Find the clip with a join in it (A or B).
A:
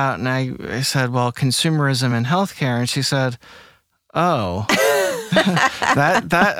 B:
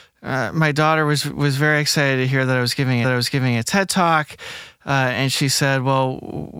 B